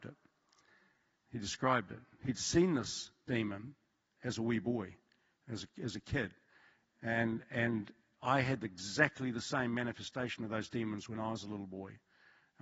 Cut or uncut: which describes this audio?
uncut